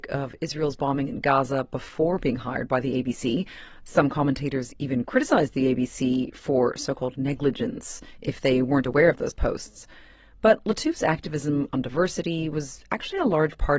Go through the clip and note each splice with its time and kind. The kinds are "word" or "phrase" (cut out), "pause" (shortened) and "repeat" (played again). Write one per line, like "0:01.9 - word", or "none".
none

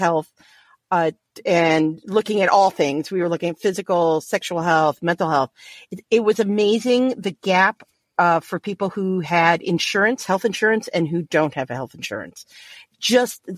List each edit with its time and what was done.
none

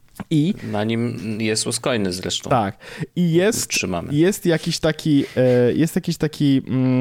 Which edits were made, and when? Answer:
none

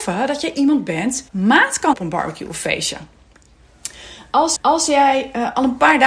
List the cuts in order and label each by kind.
0:01.3 - word
0:01.9 - word
0:04.6 - repeat

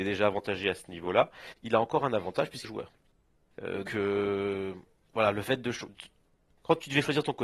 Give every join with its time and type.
0:02.6 - phrase
0:03.9 - word
0:05.9 - word

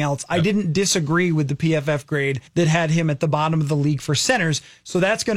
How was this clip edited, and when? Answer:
0:02.5 - pause

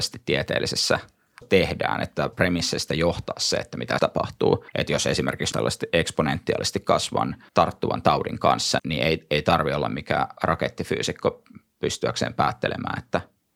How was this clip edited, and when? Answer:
0:01.4 - word
0:02.3 - phrase
0:04.0 - word
0:04.7 - pause
0:05.5 - phrase
0:07.5 - pause
0:08.8 - word

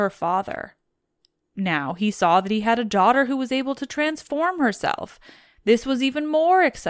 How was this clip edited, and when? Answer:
none

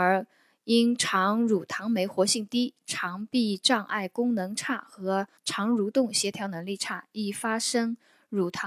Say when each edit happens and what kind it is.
0:05.4 - pause

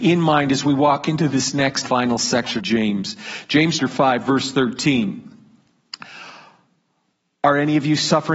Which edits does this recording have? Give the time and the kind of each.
0:01.8 - word
0:02.6 - word
0:03.8 - word

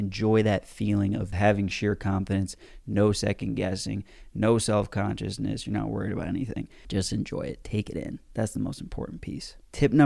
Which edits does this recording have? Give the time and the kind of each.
none

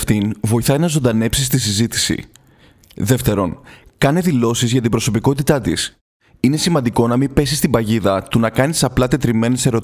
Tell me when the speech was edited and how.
none

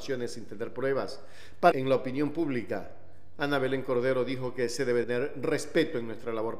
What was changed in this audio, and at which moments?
0:01.7 - word
0:05.0 - word

